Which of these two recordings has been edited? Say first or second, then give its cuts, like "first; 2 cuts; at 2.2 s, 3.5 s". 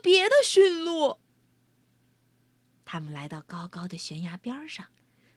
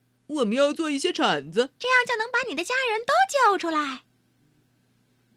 second; 1 cut; at 1.8 s